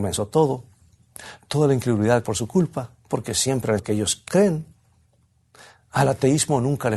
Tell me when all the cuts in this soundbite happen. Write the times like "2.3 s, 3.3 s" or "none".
2.2 s, 3.0 s, 3.8 s, 4.3 s